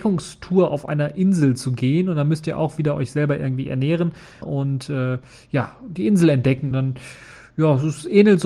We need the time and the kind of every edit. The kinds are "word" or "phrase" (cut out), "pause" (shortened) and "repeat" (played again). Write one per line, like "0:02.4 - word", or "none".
0:04.4 - word
0:06.7 - word